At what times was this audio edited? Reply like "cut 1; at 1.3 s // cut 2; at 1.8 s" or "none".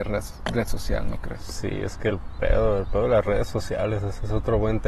none